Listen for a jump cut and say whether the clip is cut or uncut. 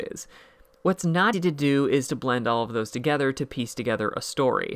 cut